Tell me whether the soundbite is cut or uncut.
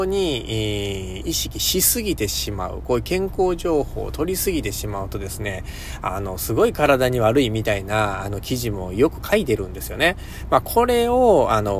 uncut